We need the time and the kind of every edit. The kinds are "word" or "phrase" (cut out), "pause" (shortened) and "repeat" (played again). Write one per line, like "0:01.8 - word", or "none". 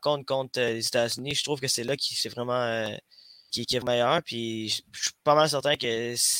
0:03.5 - word
0:03.8 - phrase